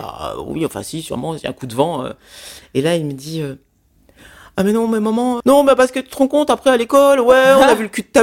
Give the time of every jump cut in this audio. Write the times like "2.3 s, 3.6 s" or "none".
5.4 s